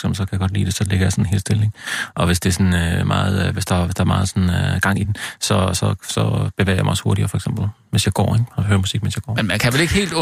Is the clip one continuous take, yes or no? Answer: yes